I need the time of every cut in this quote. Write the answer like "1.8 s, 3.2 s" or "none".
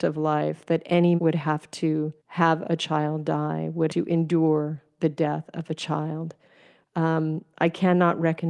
1.2 s, 2.2 s, 3.9 s